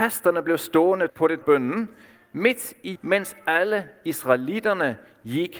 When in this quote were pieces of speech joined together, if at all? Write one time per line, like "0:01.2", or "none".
0:01.1
0:01.4
0:03.0